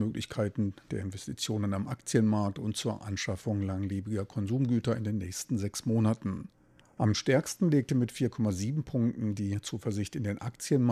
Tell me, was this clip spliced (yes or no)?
no